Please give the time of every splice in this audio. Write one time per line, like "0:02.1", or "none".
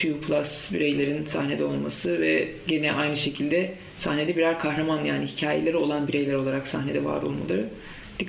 none